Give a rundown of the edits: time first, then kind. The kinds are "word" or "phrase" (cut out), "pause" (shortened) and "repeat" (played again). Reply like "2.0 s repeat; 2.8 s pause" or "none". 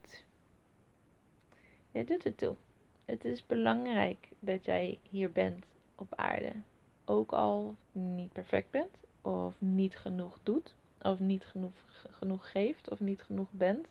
7.8 s phrase